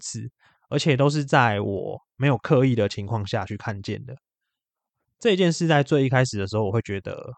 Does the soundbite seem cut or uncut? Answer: uncut